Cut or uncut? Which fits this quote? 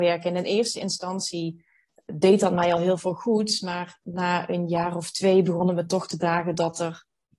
uncut